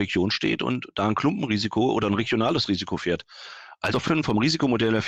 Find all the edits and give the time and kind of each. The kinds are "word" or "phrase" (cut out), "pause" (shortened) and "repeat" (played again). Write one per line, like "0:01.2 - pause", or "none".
0:03.9 - word